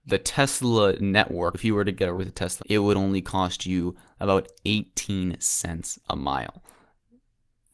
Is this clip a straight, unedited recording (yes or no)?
no